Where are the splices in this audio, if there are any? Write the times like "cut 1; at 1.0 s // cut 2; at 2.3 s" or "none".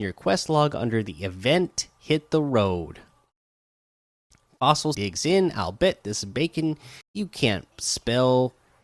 cut 1; at 4.9 s // cut 2; at 7.0 s // cut 3; at 7.7 s

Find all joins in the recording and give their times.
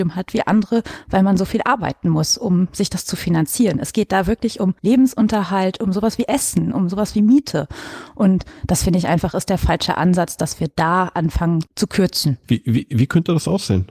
cut 1; at 4.8 s // cut 2; at 11.7 s

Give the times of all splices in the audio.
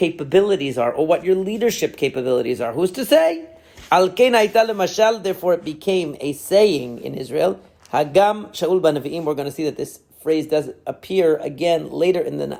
none

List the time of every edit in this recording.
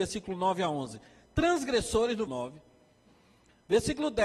cut 1; at 2.3 s

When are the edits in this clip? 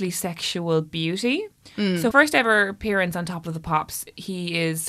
cut 1; at 2.1 s

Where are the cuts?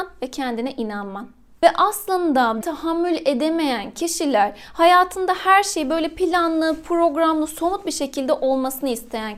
cut 1; at 2.6 s

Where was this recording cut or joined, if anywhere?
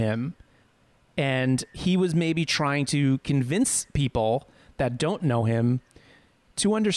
none

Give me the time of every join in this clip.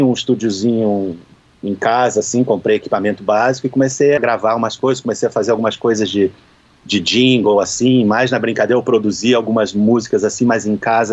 cut 1; at 4.2 s

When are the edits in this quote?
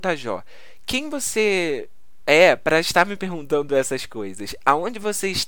none

